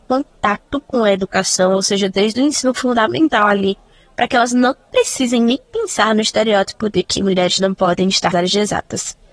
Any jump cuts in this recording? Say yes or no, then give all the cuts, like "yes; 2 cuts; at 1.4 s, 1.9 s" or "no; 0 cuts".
yes; 1 cut; at 8.3 s